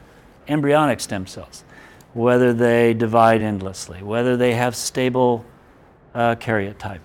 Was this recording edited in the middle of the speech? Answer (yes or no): no